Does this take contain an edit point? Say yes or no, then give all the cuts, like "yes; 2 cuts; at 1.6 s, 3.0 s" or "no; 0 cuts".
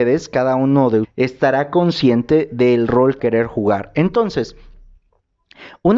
yes; 2 cuts; at 1.0 s, 3.2 s